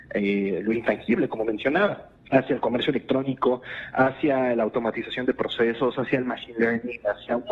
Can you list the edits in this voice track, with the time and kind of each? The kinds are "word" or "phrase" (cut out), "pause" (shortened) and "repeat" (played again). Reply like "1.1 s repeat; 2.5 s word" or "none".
2.2 s pause